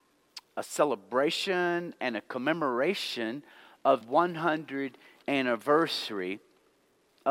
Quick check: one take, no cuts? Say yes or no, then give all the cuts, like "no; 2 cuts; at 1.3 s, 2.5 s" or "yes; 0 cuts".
no; 2 cuts; at 4.0 s, 5.2 s